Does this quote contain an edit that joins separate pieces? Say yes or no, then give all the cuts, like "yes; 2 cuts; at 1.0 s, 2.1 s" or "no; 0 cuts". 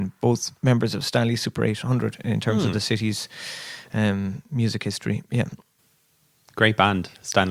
no; 0 cuts